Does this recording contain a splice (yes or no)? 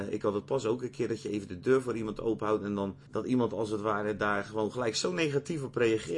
yes